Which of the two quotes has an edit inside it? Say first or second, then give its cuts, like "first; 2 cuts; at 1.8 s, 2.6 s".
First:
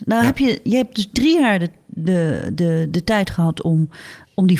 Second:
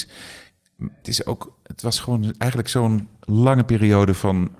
second; 1 cut; at 1.0 s